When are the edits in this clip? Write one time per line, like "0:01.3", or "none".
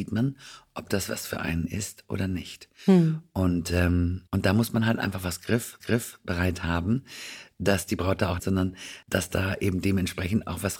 0:04.3
0:05.8
0:08.4
0:09.0